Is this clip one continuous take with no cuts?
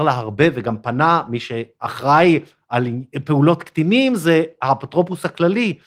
yes; 0 cuts

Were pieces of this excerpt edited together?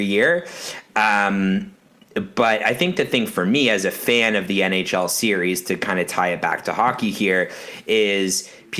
no; 0 cuts

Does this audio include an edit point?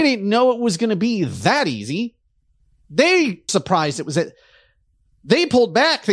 yes; 1 cut; at 3.5 s

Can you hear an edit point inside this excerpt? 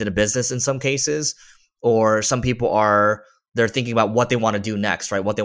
no; 0 cuts

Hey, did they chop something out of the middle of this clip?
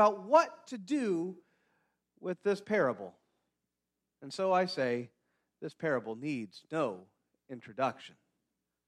no; 0 cuts

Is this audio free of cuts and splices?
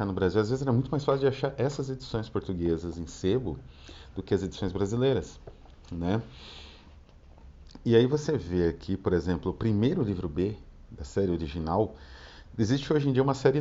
yes; 0 cuts

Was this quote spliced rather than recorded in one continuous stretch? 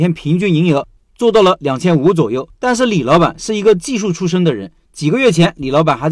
yes; 1 cut; at 2.5 s

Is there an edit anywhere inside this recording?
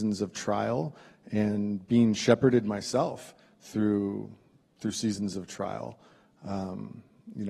no; 0 cuts

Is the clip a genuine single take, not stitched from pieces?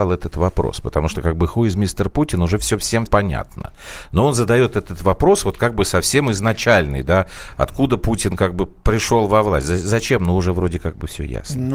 no; 1 cut; at 3.1 s

